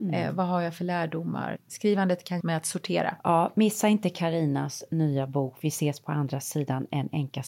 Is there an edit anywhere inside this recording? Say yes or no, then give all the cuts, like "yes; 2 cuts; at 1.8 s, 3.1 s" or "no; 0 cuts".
yes; 3 cuts; at 1.6 s, 2.4 s, 3.2 s